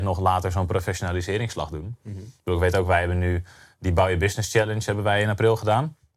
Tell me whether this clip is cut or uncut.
uncut